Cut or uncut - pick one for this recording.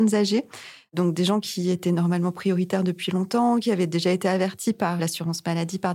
cut